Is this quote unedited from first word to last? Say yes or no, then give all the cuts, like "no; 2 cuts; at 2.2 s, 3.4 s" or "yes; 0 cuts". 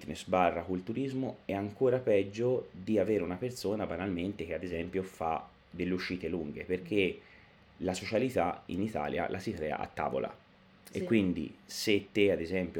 yes; 0 cuts